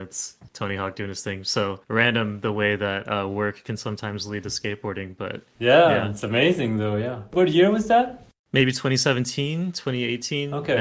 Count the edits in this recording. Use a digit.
1